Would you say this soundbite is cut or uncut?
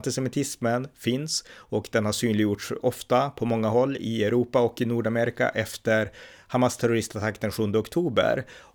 uncut